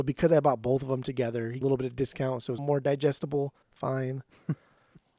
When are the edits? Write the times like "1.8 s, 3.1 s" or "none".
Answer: 1.6 s, 2.6 s, 3.6 s

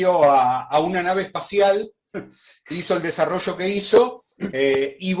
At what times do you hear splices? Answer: none

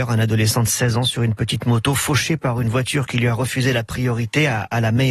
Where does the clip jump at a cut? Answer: none

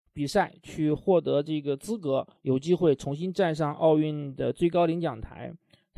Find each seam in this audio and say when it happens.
2.4 s

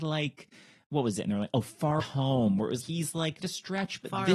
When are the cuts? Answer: 2.0 s, 2.8 s, 3.4 s

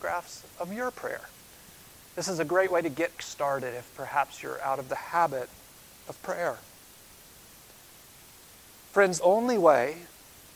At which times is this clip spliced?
3.2 s, 9.2 s

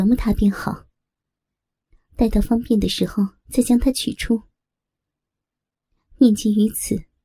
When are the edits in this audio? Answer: none

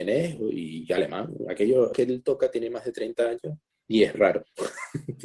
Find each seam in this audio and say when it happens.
1.9 s, 3.7 s, 4.1 s

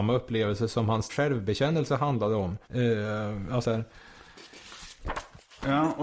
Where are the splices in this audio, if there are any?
1.1 s, 2.6 s, 3.6 s

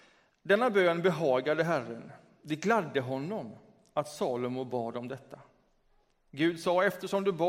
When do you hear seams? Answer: none

